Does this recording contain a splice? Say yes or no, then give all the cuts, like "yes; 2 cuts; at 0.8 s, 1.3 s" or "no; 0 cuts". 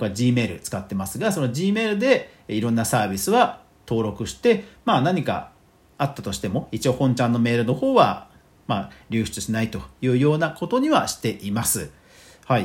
no; 0 cuts